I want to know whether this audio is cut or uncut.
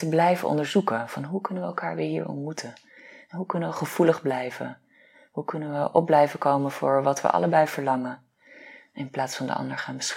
uncut